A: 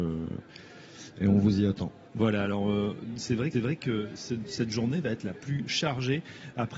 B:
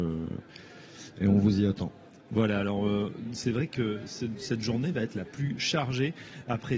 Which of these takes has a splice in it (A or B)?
A